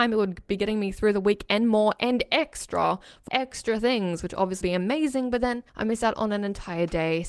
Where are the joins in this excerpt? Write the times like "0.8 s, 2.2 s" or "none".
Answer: 3.3 s, 4.6 s, 5.7 s